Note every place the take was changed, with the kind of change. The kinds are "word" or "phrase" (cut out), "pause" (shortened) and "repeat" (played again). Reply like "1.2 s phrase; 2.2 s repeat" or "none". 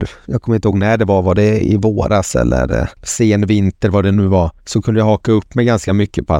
4.6 s pause